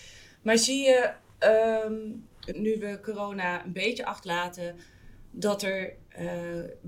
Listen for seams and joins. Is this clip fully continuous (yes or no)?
no